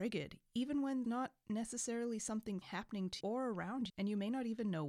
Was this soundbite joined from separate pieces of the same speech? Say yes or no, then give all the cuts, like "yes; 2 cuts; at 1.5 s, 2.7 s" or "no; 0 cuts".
yes; 4 cuts; at 1.0 s, 2.6 s, 3.2 s, 3.9 s